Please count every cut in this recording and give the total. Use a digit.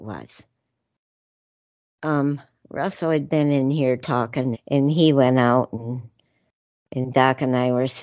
1